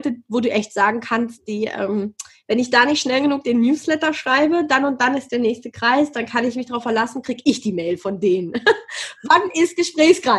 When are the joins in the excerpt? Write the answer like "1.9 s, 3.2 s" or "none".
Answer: none